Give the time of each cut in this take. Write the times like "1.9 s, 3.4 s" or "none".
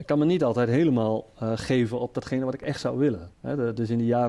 3.3 s

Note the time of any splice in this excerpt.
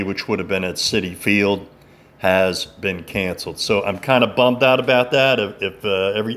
none

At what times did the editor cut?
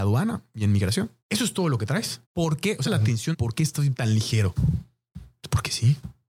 1.2 s, 2.2 s, 2.9 s, 3.3 s, 3.9 s

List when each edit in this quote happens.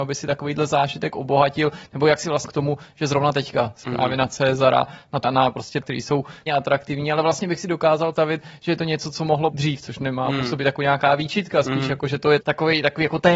2.5 s, 3.8 s, 5.2 s, 5.8 s, 6.5 s, 8.1 s, 9.5 s, 12.4 s

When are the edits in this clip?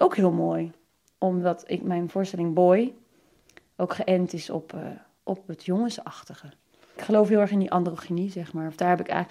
none

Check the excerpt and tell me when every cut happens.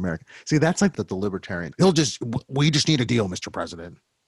0.9 s, 1.7 s, 3.1 s

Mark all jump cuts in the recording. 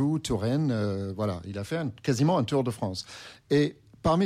none

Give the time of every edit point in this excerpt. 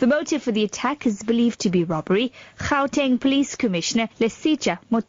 4.1 s

